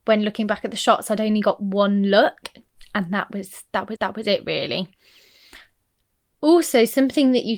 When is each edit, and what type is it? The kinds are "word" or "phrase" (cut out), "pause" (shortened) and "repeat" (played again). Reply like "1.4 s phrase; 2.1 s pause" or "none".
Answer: 4.0 s repeat